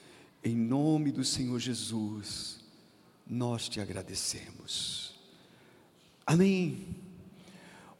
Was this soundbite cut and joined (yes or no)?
no